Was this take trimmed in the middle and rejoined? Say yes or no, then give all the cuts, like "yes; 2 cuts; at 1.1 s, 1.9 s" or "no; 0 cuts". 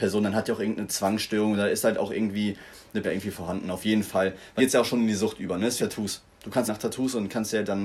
yes; 4 cuts; at 3.0 s, 4.6 s, 5.8 s, 6.7 s